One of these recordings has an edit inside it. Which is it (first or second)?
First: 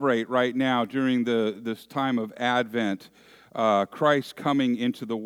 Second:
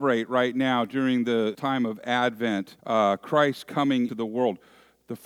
second